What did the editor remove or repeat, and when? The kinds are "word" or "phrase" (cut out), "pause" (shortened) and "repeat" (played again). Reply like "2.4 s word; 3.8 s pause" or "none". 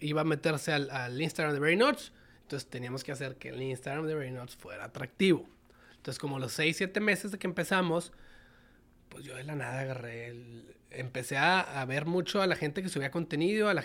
none